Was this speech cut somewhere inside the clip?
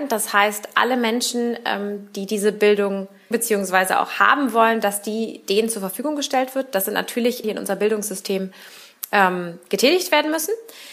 yes; 2 cuts; at 3.3 s, 7.4 s

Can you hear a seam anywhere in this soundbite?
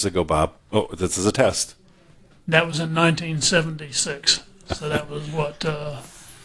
no; 0 cuts

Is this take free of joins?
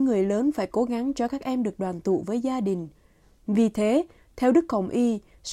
yes; 0 cuts

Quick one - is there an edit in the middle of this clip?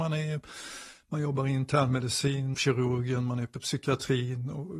yes; 1 cut; at 2.5 s

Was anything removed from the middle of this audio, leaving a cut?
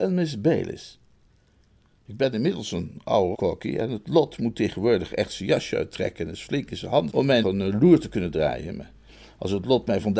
yes; 3 cuts; at 3.3 s, 7.1 s, 7.4 s

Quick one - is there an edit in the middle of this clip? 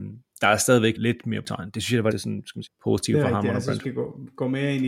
yes; 5 cuts; at 1.0 s, 1.4 s, 2.1 s, 2.7 s, 3.8 s

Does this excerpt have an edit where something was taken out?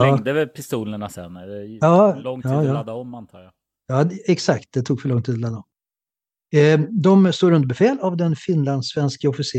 no; 0 cuts

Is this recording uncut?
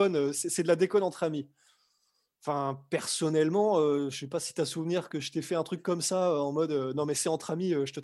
yes; 0 cuts

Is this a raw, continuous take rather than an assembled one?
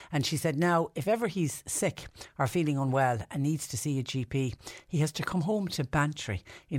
yes; 0 cuts

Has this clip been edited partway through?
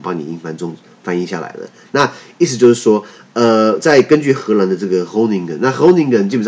no; 0 cuts

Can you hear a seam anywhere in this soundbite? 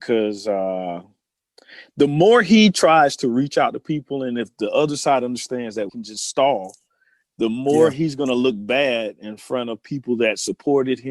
yes; 1 cut; at 5.9 s

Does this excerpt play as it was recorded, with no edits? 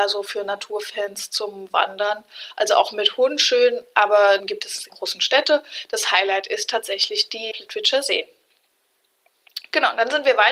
no; 3 cuts; at 4.4 s, 4.9 s, 7.5 s

